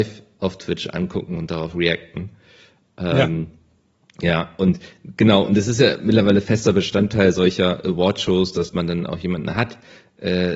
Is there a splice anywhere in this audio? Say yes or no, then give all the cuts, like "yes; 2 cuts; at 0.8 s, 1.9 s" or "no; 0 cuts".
no; 0 cuts